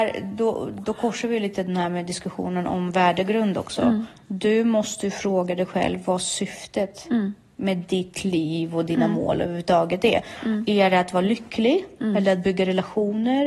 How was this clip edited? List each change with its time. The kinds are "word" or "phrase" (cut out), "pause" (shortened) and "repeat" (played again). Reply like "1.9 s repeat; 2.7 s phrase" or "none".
none